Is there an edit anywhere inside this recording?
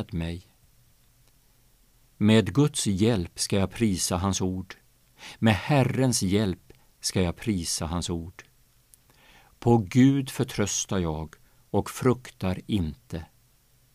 no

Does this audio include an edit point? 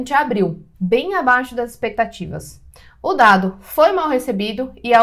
no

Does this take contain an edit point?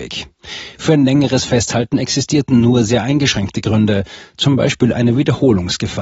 no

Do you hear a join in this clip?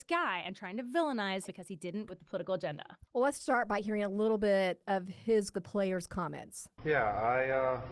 yes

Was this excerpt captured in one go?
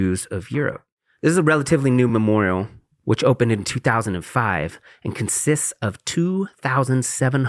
yes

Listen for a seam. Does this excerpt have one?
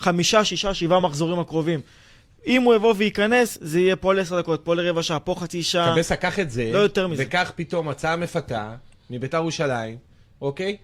no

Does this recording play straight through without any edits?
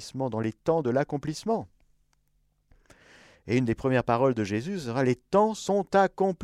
yes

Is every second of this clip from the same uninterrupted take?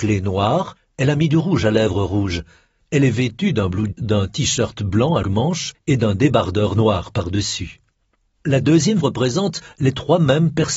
no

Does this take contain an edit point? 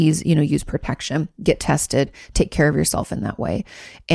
no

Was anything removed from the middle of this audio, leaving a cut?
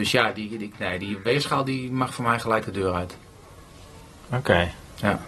no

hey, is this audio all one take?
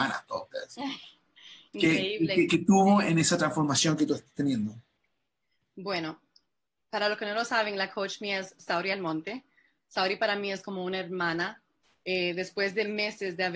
yes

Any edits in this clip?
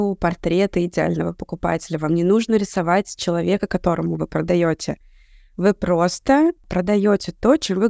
no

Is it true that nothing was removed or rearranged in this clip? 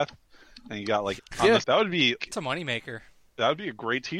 no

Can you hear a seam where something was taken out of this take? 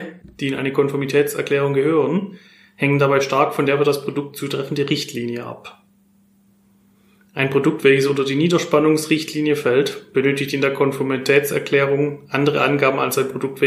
no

